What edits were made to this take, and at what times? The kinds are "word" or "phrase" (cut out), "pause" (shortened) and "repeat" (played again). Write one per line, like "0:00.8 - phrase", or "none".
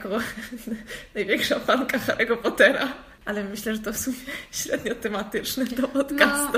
none